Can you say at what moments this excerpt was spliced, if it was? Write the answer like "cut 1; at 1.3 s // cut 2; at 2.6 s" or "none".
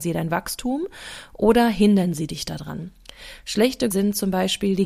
cut 1; at 3.9 s